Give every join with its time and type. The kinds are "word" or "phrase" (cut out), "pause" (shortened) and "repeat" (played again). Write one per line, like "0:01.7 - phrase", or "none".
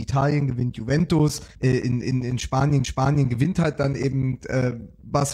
0:01.5 - pause
0:02.8 - repeat